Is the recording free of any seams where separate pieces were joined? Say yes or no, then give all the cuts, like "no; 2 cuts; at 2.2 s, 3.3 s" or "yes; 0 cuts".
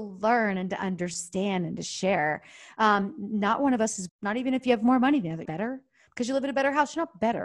no; 2 cuts; at 4.1 s, 5.4 s